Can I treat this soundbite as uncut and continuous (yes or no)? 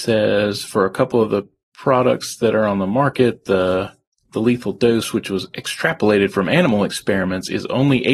yes